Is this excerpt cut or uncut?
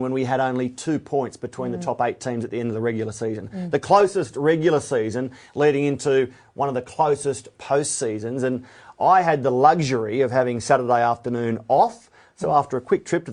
uncut